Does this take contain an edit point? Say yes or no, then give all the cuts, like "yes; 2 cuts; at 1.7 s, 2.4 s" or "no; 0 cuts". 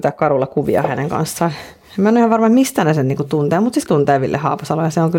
yes; 1 cut; at 3.9 s